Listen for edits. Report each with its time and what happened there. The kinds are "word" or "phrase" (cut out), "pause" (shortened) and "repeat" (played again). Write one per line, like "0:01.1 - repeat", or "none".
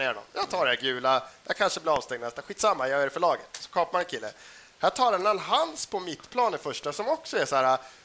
none